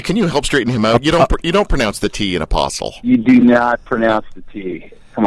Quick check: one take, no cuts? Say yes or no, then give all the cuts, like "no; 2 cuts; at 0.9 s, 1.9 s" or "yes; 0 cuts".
yes; 0 cuts